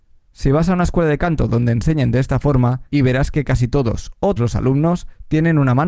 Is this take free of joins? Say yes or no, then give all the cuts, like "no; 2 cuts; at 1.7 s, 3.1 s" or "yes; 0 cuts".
no; 2 cuts; at 2.9 s, 4.4 s